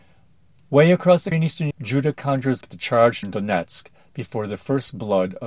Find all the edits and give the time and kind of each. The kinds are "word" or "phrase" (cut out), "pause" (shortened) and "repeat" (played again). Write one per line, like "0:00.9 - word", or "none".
0:01.3 - word
0:01.7 - word
0:02.6 - word
0:03.2 - word